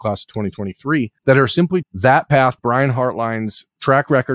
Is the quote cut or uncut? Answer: cut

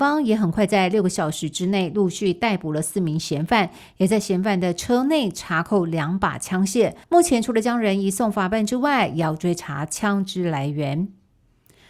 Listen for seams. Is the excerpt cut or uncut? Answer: cut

